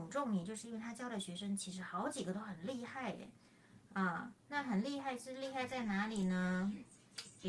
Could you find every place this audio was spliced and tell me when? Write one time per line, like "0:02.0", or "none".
0:04.4